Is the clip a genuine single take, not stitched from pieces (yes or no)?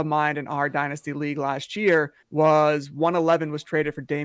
no